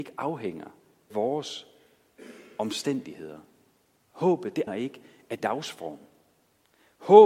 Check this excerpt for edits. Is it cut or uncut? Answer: cut